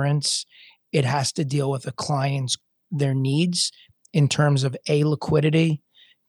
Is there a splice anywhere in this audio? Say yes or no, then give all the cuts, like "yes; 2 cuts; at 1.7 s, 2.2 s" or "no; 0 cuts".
yes; 1 cut; at 2.8 s